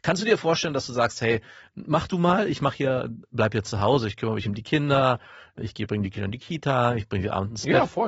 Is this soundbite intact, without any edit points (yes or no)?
yes